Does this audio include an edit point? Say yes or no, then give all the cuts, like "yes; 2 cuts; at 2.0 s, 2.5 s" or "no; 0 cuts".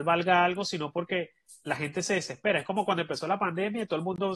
no; 0 cuts